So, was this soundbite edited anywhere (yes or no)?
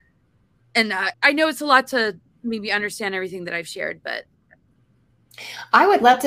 yes